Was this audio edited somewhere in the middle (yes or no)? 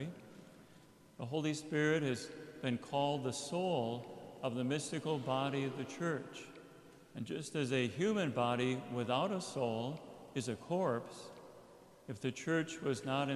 no